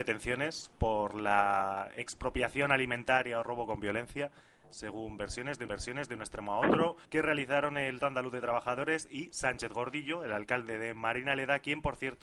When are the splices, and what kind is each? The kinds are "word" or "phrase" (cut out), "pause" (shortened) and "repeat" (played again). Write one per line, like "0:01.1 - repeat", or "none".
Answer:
0:05.7 - repeat
0:07.0 - pause
0:08.0 - word